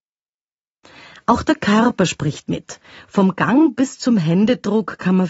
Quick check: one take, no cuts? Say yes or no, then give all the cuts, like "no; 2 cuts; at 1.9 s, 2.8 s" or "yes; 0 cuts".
yes; 0 cuts